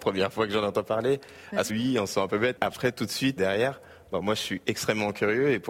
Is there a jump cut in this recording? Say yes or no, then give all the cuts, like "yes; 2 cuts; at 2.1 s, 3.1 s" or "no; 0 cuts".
yes; 3 cuts; at 1.7 s, 2.6 s, 3.4 s